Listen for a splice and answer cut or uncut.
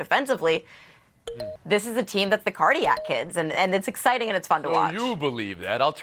uncut